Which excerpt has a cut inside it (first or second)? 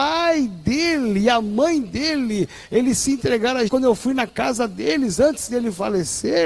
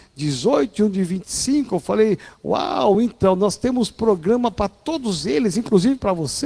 first